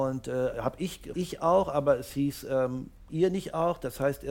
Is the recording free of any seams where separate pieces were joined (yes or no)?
no